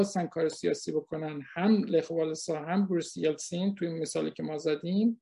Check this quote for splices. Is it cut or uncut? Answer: uncut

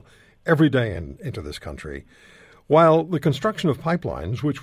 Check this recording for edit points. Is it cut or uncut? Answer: uncut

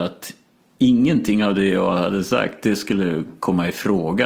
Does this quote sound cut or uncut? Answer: uncut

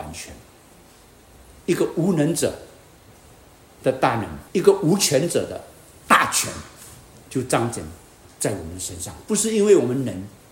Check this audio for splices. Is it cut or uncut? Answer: cut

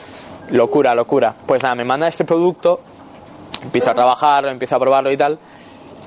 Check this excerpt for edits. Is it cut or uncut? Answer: cut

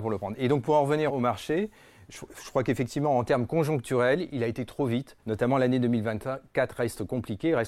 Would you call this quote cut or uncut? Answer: cut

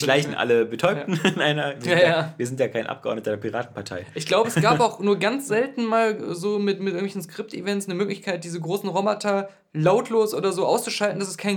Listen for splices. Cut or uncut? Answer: uncut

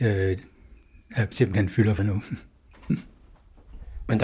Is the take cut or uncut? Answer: cut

